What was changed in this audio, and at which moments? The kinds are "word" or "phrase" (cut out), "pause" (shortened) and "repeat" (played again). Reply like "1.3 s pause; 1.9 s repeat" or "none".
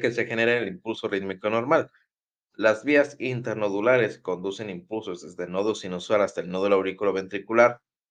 none

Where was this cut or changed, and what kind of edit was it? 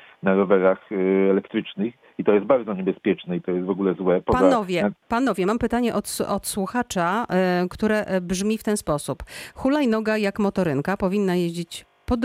5.0 s pause

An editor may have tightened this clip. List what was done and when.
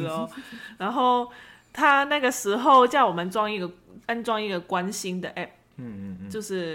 4.0 s pause

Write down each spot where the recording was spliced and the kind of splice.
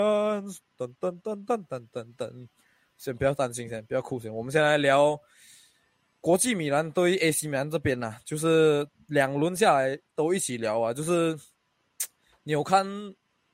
none

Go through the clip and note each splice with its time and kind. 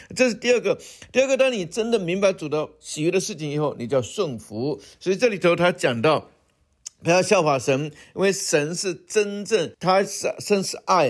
9.7 s pause

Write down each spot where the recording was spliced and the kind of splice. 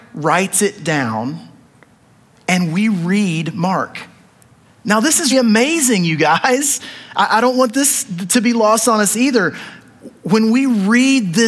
5.3 s word

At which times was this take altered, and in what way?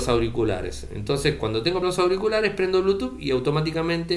1.8 s word

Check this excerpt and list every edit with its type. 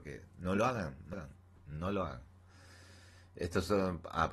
1.1 s word; 1.6 s pause

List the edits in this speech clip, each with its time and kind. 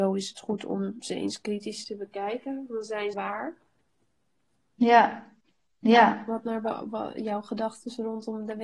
3.1 s word

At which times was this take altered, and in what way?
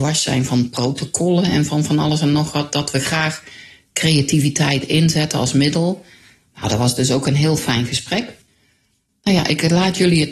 none

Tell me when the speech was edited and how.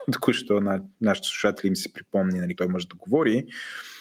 2.6 s word

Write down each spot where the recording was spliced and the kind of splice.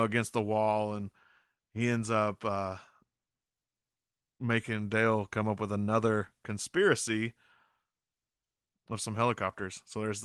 none

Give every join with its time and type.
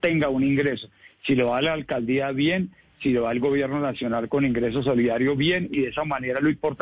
none

